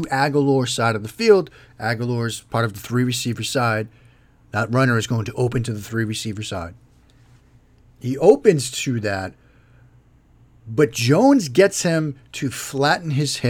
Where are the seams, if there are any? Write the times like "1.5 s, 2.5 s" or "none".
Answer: none